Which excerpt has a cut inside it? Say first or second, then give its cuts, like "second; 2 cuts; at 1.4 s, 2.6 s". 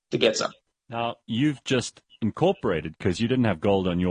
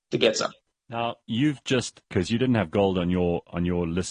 second; 1 cut; at 2.1 s